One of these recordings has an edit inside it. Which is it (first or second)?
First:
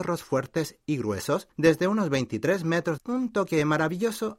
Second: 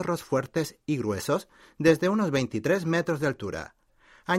first